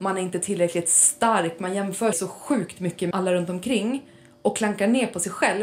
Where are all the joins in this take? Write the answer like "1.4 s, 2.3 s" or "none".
2.1 s, 3.1 s